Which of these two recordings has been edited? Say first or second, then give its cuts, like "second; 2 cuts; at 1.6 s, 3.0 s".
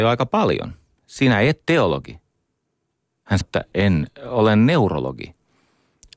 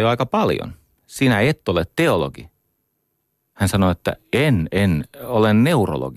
first; 3 cuts; at 1.6 s, 3.4 s, 3.7 s